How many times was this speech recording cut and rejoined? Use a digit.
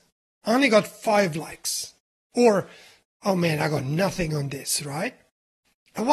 0